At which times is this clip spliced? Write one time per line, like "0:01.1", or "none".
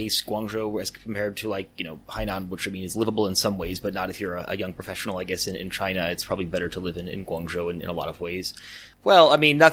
none